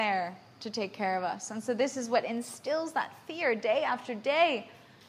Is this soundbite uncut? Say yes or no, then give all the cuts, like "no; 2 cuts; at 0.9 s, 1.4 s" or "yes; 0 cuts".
yes; 0 cuts